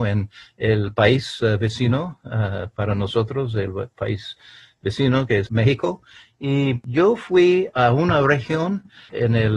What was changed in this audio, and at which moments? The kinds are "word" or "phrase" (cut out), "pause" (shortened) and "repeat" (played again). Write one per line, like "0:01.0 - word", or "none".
none